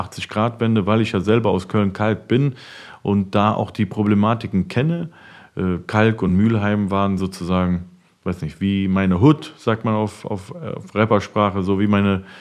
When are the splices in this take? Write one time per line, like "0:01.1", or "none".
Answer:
none